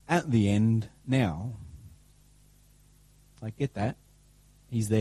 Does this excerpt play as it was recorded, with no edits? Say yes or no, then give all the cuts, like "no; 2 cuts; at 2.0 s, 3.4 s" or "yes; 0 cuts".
yes; 0 cuts